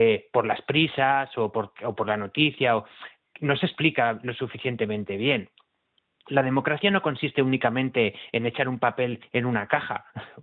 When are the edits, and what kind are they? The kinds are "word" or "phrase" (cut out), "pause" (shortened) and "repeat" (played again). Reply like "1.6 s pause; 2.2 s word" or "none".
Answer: none

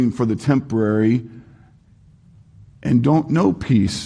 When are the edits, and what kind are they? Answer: none

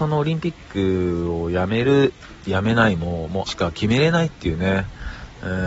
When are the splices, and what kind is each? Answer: 3.5 s word

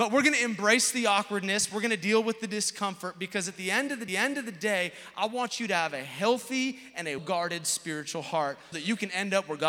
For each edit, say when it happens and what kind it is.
4.1 s repeat; 7.2 s word; 8.7 s word

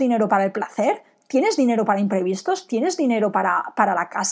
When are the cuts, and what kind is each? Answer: none

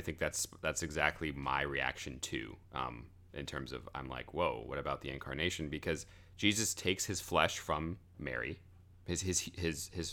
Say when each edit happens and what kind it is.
2.7 s pause

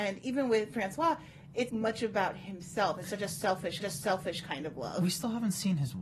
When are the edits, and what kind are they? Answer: 1.7 s word; 3.8 s repeat

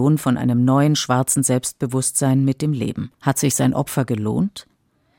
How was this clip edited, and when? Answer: 3.1 s pause

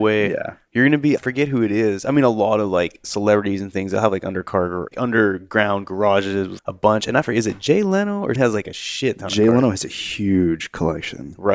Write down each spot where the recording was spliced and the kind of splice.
4.9 s word; 6.6 s word; 8.4 s word

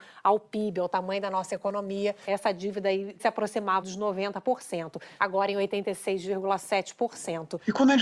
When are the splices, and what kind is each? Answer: 3.2 s word; 3.8 s word

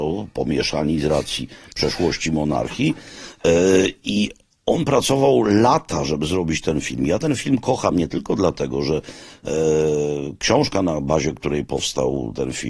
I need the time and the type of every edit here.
none

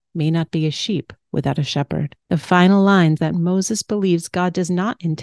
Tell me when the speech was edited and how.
2.2 s pause; 3.2 s word

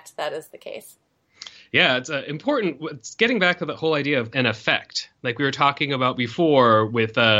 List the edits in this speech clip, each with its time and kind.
4.3 s word

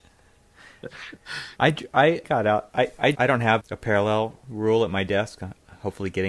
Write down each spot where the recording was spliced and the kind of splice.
1.5 s pause; 2.2 s word; 3.1 s word; 3.6 s word

